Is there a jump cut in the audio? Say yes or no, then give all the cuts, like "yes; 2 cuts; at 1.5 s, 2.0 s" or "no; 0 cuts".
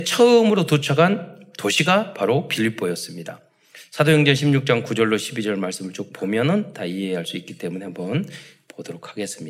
no; 0 cuts